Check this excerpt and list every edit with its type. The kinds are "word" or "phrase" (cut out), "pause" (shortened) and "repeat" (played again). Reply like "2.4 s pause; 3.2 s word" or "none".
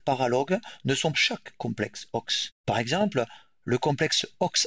1.1 s phrase; 2.6 s pause